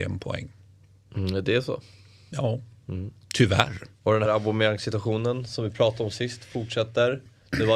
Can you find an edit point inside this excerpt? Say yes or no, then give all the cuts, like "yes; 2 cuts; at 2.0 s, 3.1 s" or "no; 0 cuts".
yes; 1 cut; at 4.3 s